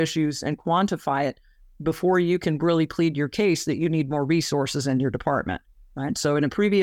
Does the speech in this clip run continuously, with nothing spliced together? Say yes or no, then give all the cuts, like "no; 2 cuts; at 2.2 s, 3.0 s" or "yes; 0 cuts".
yes; 0 cuts